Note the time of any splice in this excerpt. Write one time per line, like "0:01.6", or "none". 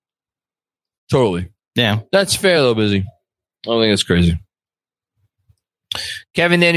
none